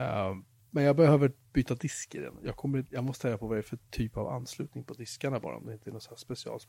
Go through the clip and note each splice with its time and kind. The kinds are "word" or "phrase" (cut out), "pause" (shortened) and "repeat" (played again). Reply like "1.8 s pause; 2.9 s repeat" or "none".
2.9 s pause